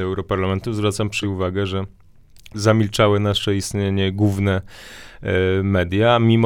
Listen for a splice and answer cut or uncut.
cut